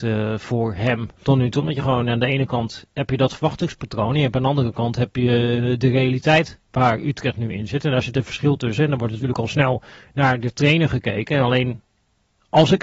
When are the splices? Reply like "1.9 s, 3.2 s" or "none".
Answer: none